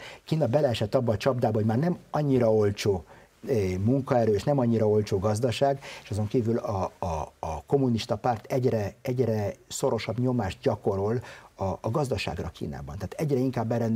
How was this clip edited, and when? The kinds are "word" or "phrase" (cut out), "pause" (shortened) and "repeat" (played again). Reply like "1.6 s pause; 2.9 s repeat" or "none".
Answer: none